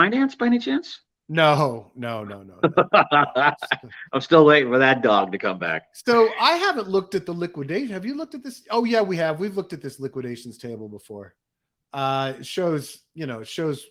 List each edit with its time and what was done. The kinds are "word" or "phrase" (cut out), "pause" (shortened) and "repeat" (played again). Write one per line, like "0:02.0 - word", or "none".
none

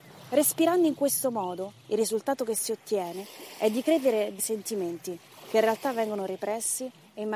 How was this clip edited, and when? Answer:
0:04.4 - word

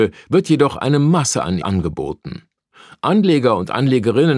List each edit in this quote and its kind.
0:01.6 - word

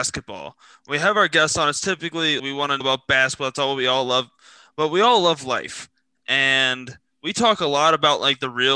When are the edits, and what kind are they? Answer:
0:02.4 - word
0:02.8 - word

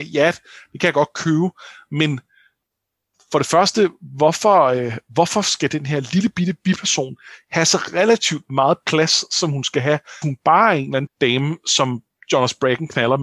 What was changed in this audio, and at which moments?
0:06.3 - word
0:10.2 - word
0:11.1 - word

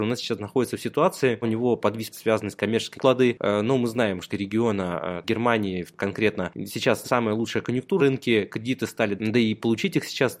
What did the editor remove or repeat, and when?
0:01.4 - word
0:02.1 - word
0:02.9 - word
0:04.3 - word
0:05.2 - word
0:07.0 - word
0:08.0 - word
0:09.2 - word

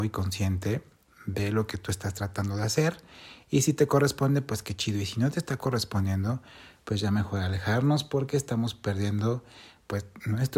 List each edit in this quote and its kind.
none

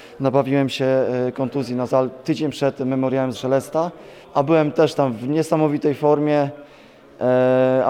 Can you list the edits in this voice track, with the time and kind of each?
0:01.9 - word
0:03.3 - word
0:04.2 - pause

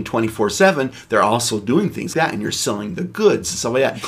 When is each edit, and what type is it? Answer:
0:02.1 - word

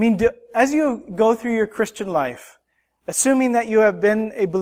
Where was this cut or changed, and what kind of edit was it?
none

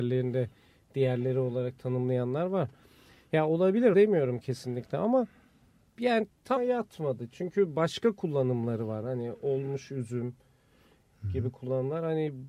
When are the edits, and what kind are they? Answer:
0:03.9 - word
0:06.6 - word

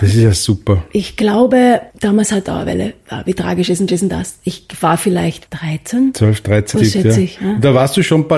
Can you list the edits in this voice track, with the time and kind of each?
0:01.9 - pause
0:02.4 - phrase
0:03.9 - repeat
0:05.5 - word
0:06.7 - phrase

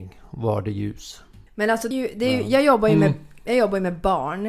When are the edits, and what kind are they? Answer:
0:01.5 - pause
0:01.9 - word

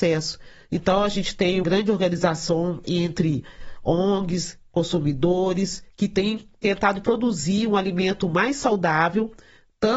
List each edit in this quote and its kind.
0:01.6 - word
0:02.8 - word
0:05.9 - word

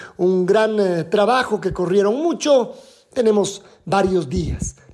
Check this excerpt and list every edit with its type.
none

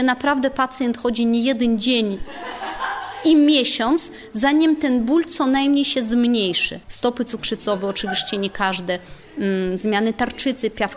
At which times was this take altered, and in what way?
0:06.8 - pause

